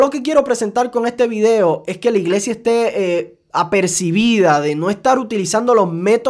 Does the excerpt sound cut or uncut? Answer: uncut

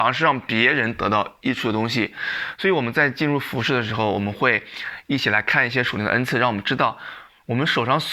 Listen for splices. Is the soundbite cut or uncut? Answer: uncut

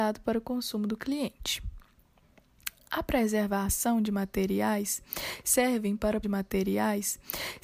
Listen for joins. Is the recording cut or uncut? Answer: cut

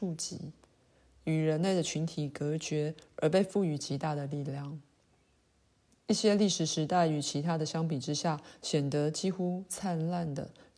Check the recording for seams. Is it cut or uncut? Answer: uncut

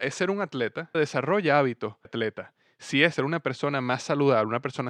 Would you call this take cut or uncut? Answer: cut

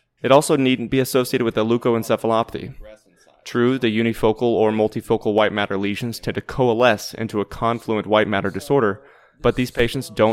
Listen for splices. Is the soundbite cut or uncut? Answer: uncut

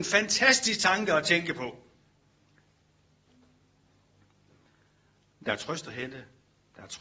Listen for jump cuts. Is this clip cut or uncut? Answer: uncut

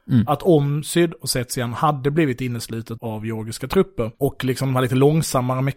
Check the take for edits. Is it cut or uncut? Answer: cut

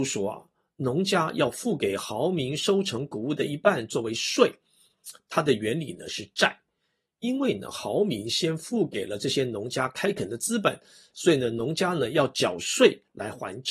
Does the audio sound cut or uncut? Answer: uncut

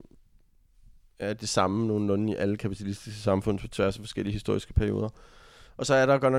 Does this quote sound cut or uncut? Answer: uncut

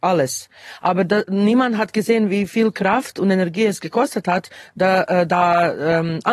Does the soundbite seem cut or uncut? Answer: uncut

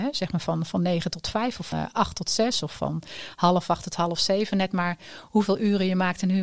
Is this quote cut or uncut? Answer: cut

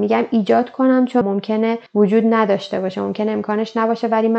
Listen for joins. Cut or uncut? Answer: cut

